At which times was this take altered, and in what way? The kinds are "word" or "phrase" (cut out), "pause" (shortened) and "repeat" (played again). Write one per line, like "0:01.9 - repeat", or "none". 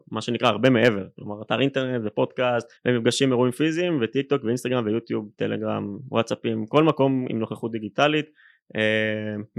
0:02.8 - pause